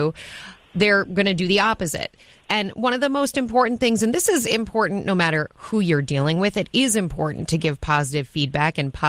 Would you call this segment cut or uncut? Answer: uncut